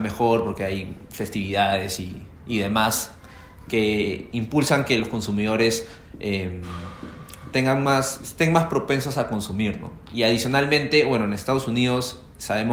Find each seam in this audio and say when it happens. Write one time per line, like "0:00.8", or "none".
none